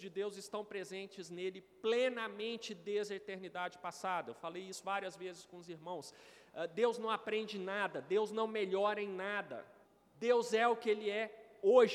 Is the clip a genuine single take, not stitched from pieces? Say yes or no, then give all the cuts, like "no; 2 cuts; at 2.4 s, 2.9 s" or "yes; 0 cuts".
no; 1 cut; at 9.8 s